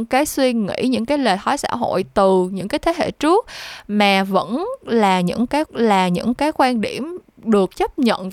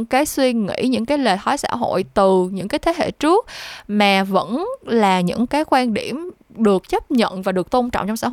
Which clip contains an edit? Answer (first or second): first